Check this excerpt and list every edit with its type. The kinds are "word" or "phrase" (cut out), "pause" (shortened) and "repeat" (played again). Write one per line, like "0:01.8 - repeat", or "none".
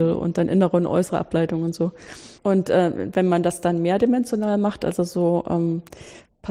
0:02.4 - pause